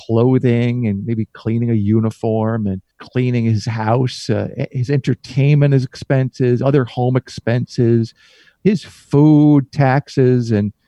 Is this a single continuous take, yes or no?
no